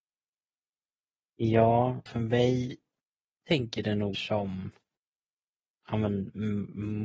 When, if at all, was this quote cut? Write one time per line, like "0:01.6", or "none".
0:02.1
0:03.4
0:04.1